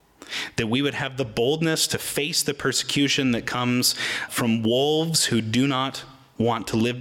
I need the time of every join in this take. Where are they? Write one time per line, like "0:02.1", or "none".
0:04.3